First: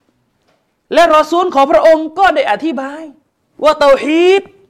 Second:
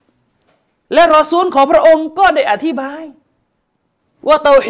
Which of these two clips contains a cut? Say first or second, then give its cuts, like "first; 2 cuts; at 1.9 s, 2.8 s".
first; 1 cut; at 3.3 s